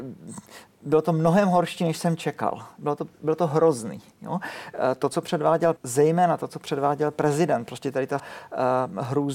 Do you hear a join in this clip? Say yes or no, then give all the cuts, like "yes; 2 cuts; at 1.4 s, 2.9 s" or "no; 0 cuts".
yes; 3 cuts; at 4.1 s, 5.8 s, 8.2 s